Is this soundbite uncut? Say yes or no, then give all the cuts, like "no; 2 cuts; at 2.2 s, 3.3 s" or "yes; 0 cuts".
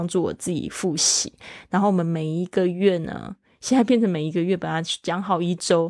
yes; 0 cuts